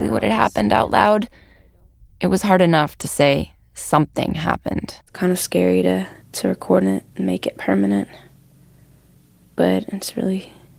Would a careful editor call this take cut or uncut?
cut